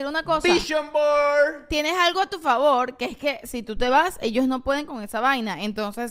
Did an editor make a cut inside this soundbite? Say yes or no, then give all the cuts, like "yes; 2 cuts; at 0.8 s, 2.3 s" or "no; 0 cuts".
no; 0 cuts